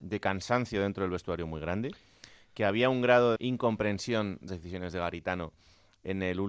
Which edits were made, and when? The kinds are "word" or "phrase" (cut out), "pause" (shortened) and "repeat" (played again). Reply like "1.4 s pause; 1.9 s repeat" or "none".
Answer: 3.4 s word; 4.5 s word